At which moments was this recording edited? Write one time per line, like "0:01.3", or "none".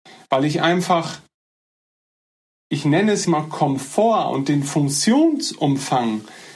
0:02.5
0:03.2